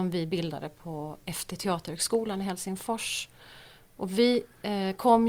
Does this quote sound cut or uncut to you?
uncut